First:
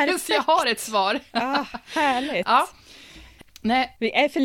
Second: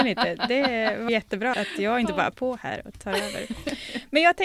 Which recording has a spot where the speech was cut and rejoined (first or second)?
second